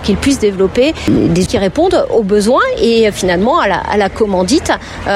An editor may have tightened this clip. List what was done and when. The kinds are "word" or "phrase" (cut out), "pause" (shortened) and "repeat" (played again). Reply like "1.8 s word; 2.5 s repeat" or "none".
1.5 s word